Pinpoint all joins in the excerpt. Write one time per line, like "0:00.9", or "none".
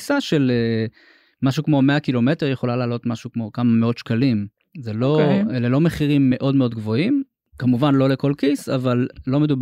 none